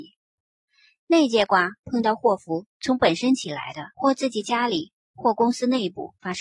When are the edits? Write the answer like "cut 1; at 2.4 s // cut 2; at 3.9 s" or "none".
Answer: cut 1; at 2.7 s // cut 2; at 3.9 s